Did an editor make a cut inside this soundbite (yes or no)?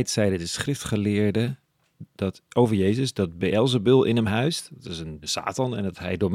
yes